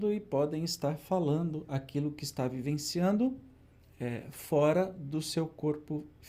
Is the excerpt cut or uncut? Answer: uncut